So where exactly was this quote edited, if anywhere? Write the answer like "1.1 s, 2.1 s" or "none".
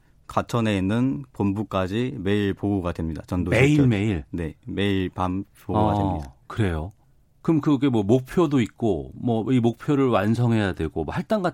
7.0 s

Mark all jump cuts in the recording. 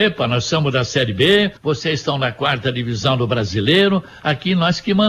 1.6 s

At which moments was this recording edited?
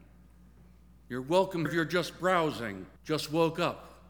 1.7 s, 3.0 s

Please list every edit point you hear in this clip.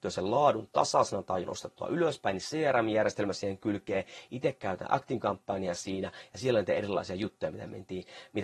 1.4 s

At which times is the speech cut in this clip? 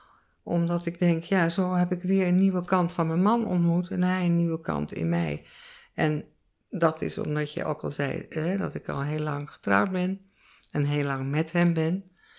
none

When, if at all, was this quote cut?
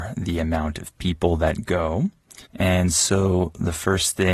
2.5 s

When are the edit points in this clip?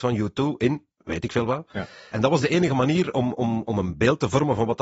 none

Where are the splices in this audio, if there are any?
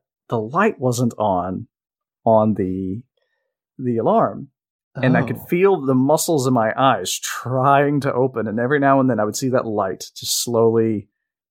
none

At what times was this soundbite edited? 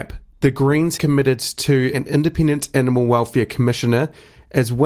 1.0 s, 1.9 s

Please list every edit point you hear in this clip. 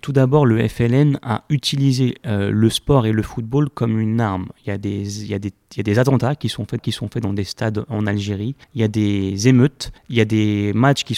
6.8 s, 8.6 s, 10.0 s

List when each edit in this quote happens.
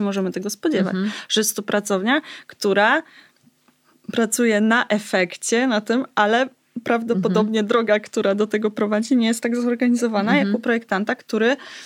none

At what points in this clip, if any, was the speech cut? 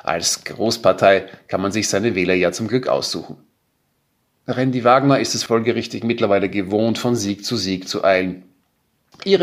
none

